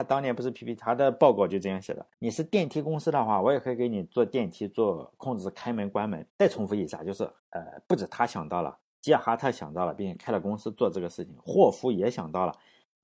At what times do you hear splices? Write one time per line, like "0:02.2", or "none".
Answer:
0:02.1
0:06.3
0:07.4